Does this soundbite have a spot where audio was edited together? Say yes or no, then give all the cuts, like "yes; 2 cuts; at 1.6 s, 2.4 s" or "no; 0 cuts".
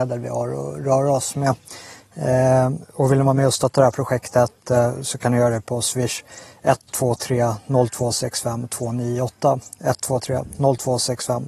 no; 0 cuts